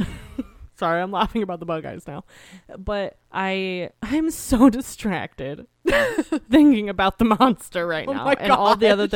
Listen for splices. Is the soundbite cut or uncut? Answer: cut